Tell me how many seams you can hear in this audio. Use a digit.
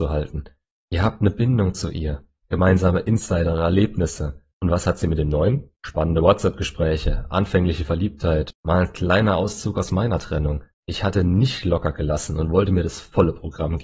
4